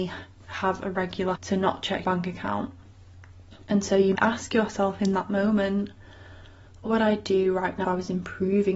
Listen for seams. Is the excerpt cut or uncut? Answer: cut